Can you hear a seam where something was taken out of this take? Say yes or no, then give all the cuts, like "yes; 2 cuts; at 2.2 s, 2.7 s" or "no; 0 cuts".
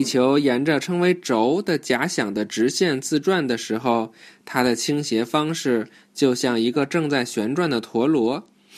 no; 0 cuts